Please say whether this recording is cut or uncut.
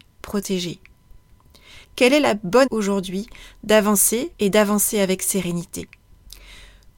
cut